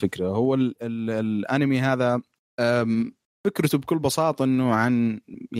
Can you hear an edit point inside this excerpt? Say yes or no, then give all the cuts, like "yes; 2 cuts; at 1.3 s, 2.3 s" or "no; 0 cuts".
no; 0 cuts